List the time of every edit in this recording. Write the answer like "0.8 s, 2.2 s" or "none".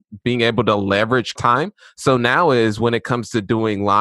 1.4 s